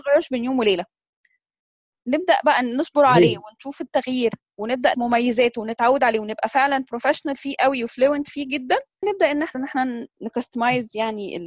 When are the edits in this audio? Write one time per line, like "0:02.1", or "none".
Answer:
0:04.9
0:09.0
0:09.5